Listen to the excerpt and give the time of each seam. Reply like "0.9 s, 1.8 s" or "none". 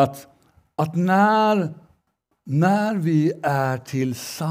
none